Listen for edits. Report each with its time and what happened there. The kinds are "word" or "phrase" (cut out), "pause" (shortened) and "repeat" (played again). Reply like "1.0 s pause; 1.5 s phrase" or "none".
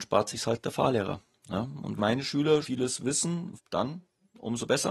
2.0 s word; 2.6 s word; 3.6 s word

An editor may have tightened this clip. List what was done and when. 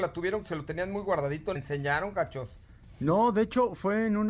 1.6 s phrase

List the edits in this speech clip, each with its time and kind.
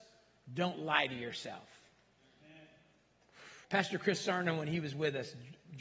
3.6 s pause

